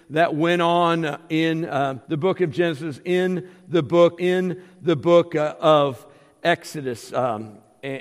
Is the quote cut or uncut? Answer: cut